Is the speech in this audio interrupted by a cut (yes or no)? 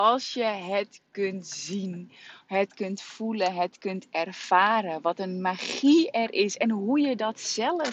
no